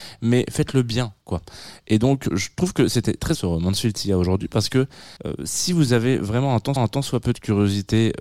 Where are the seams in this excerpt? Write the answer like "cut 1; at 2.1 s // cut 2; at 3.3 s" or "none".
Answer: cut 1; at 2.3 s // cut 2; at 3.3 s // cut 3; at 5.2 s // cut 4; at 6.8 s